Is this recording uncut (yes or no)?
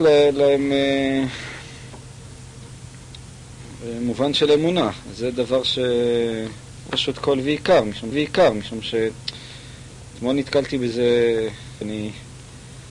no